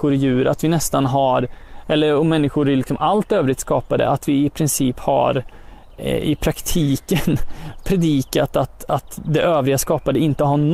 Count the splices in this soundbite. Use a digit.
0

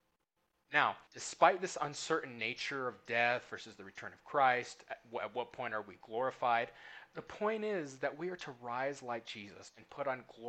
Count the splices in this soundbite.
1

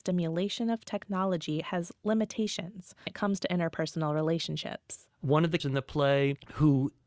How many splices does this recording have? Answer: 2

